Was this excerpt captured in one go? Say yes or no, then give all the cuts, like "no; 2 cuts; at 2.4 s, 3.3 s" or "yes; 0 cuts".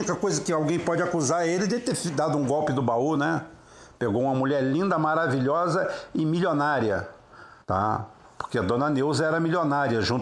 no; 1 cut; at 7.6 s